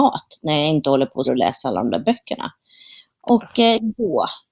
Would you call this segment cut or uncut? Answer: cut